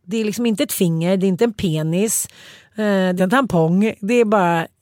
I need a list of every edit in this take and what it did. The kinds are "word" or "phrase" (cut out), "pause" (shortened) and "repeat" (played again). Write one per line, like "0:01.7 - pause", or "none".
0:03.2 - word